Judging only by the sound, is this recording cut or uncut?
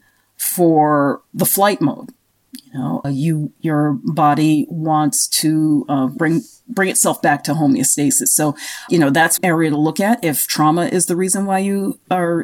cut